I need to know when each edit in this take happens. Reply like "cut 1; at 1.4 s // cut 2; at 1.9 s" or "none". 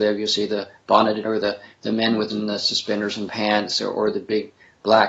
cut 1; at 1.2 s // cut 2; at 2.3 s // cut 3; at 3.3 s